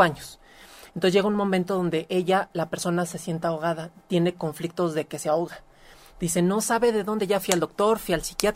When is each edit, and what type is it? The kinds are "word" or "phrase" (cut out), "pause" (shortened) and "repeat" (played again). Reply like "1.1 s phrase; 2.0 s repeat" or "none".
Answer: none